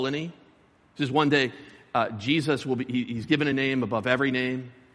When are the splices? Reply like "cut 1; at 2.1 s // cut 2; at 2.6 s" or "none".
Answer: none